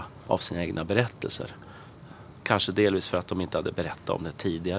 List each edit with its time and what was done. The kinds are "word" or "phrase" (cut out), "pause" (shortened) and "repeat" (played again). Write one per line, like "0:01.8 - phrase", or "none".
none